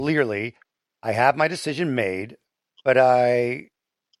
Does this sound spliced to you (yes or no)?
no